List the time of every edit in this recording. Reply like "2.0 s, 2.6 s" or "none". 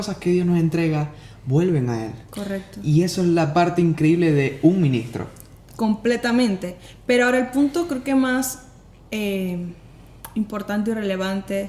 none